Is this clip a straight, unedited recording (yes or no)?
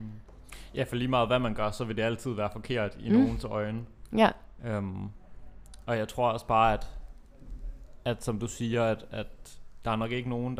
yes